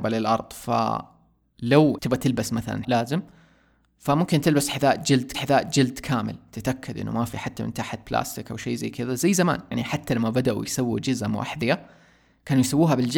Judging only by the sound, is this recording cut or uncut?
cut